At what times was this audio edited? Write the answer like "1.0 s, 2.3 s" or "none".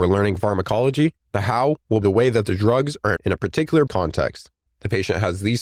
1.2 s, 2.0 s, 3.2 s, 3.9 s